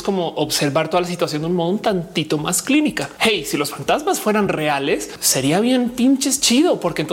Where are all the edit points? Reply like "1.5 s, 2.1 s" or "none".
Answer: none